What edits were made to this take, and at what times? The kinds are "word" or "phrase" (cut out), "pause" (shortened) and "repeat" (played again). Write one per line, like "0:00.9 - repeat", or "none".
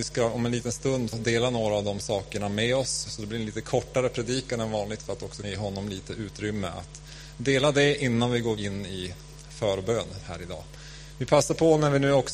0:01.1 - word
0:05.4 - word
0:08.6 - word
0:10.2 - word